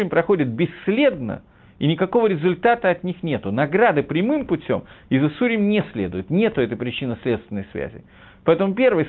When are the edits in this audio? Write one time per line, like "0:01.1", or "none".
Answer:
none